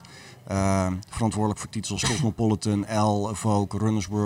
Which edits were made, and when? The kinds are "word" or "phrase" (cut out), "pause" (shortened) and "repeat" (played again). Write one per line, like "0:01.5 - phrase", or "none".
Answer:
none